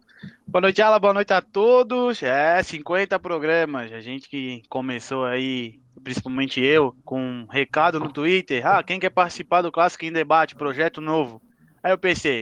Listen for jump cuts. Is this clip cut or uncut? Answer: cut